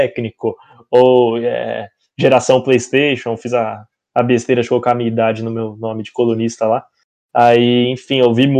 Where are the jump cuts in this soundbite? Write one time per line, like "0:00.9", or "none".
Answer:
none